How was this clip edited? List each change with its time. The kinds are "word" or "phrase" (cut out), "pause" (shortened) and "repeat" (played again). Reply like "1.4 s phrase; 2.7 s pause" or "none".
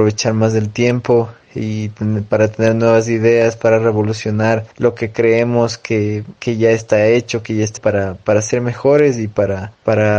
4.7 s pause; 7.8 s word